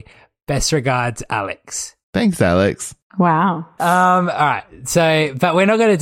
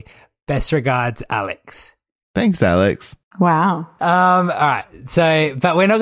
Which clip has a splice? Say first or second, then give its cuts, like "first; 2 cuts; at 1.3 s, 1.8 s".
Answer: first; 1 cut; at 2.0 s